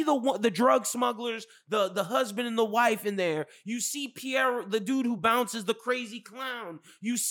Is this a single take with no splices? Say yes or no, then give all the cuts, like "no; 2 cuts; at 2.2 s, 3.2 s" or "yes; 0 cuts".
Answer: yes; 0 cuts